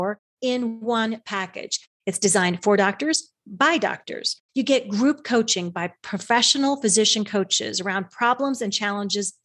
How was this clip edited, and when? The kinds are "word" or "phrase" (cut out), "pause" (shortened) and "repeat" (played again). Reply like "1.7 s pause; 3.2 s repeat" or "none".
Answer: 4.5 s pause